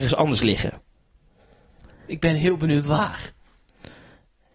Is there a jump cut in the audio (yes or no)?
no